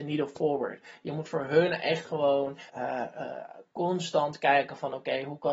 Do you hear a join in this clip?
yes; 1 cut; at 2.7 s

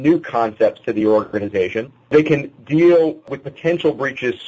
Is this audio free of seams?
yes; 0 cuts

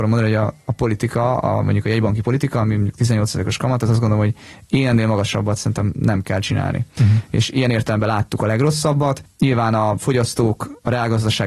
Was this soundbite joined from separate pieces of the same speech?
no; 0 cuts

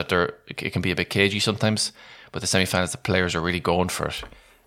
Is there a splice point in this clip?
no; 0 cuts

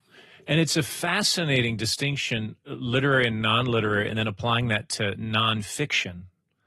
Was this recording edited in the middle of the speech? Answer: no; 0 cuts

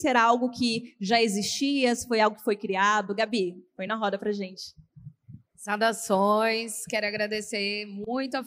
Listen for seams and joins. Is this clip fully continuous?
yes; 0 cuts

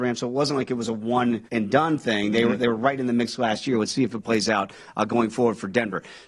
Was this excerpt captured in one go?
no; 1 cut; at 1.5 s

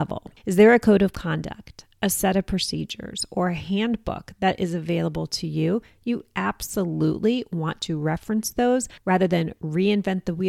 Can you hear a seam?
no; 0 cuts

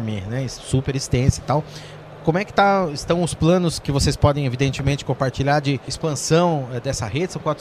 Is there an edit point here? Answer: no; 0 cuts

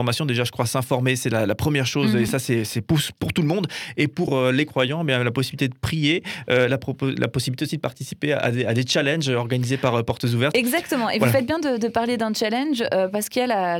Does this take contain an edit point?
no; 0 cuts

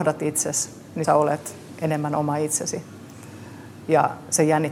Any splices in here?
yes; 1 cut; at 1.0 s

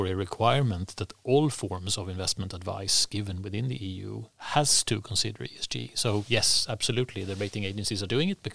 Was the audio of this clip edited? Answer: no; 0 cuts

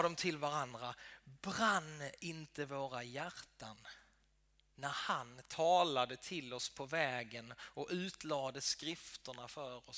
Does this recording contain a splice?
no; 0 cuts

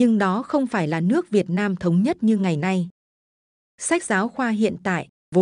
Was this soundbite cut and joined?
no; 0 cuts

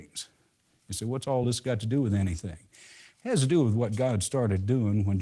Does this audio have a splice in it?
no; 0 cuts

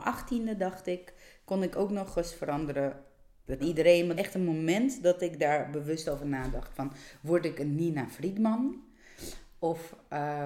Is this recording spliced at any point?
yes; 2 cuts; at 3.6 s, 4.2 s

